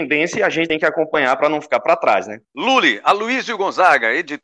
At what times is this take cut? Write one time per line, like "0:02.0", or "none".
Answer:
0:02.4